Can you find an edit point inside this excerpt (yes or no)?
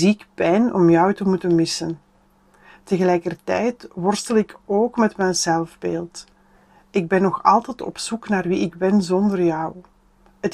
no